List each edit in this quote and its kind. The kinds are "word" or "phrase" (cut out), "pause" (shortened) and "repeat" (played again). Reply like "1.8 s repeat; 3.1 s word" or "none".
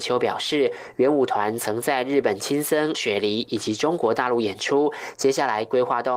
2.9 s phrase